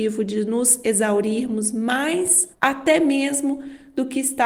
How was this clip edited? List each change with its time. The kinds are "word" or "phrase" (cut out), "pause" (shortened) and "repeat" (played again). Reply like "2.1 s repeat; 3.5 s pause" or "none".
2.5 s pause